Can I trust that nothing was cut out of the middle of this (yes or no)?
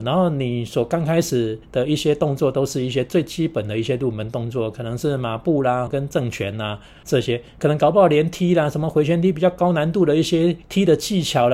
no